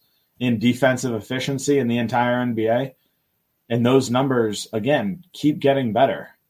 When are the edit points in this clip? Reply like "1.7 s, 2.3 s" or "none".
none